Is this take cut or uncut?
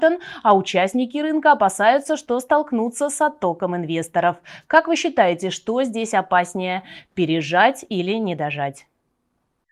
uncut